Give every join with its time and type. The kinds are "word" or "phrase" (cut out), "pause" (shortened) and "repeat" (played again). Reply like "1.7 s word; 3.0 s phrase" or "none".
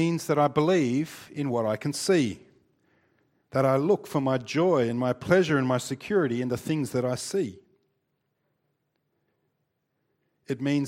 none